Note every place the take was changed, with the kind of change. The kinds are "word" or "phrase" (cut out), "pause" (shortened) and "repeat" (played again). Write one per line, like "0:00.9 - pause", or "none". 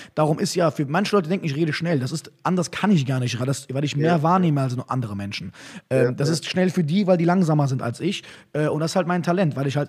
0:03.4 - word